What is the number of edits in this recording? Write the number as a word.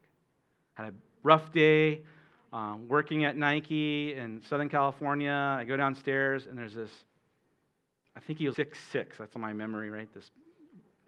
one